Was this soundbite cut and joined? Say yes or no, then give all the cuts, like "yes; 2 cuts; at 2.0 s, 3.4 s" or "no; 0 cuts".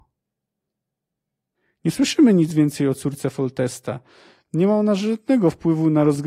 no; 0 cuts